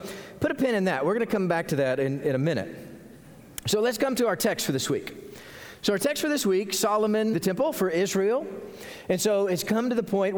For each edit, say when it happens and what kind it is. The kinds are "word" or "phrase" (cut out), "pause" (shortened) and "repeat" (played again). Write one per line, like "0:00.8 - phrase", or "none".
0:07.3 - phrase